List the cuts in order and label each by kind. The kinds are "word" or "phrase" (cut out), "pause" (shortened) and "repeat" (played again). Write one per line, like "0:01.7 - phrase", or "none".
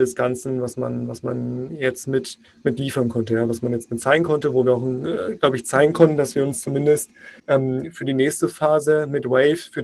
0:02.4 - pause
0:07.4 - pause